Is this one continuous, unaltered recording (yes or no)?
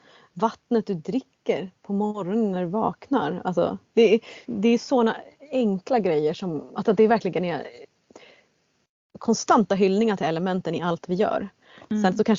yes